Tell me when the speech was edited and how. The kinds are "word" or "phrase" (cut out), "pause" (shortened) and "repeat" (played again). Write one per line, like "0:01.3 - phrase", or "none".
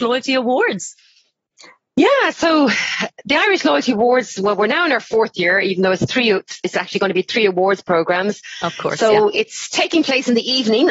none